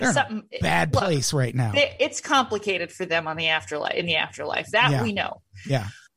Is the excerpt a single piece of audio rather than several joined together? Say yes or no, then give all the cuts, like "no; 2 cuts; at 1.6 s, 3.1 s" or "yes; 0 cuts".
yes; 0 cuts